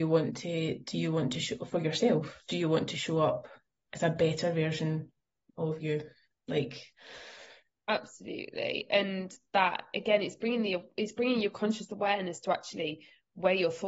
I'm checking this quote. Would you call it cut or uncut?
uncut